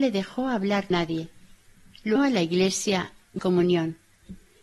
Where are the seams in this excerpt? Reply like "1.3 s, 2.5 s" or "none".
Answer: 0.9 s, 2.2 s, 3.4 s